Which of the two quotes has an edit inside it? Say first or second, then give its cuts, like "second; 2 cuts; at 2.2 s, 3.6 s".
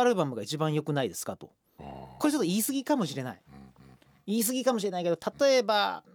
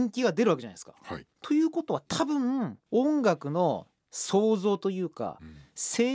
second; 1 cut; at 1.3 s